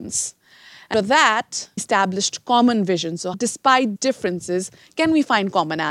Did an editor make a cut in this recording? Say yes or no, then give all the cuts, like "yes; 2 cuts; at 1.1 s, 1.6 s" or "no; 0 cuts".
yes; 4 cuts; at 0.9 s, 1.8 s, 3.3 s, 4.0 s